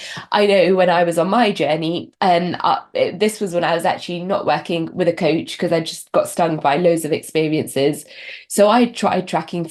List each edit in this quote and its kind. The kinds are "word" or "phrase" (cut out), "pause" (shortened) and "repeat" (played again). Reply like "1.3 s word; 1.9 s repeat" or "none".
none